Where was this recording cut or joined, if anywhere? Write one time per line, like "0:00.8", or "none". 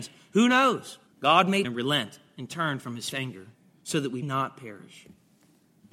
0:01.1
0:01.6
0:03.1
0:03.5
0:04.2